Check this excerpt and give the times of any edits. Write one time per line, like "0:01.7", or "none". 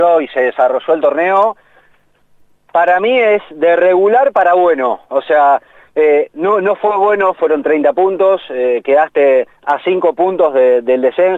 0:09.6